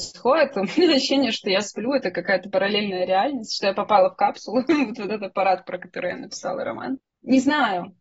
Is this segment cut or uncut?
uncut